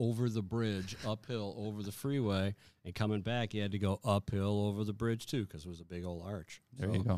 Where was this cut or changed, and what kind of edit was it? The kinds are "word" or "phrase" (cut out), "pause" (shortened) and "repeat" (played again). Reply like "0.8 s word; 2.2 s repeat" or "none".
none